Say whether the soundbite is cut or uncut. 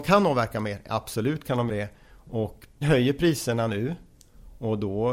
cut